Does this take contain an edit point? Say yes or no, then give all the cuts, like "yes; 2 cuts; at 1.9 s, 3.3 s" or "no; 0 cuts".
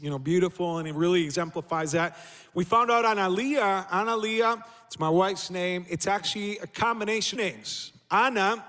yes; 1 cut; at 7.3 s